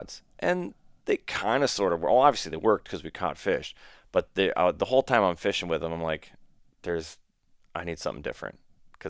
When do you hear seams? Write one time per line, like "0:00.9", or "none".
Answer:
none